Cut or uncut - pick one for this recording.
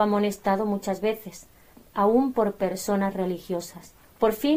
uncut